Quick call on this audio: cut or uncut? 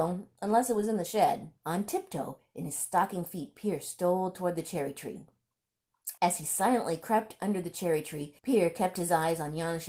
cut